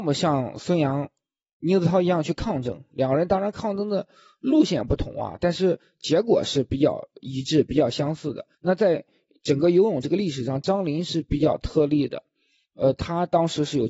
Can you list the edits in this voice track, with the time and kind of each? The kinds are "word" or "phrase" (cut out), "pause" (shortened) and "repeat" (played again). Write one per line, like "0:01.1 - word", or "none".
0:08.5 - pause